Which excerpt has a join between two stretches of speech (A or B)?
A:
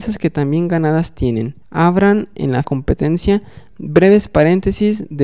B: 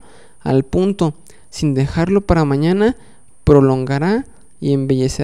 A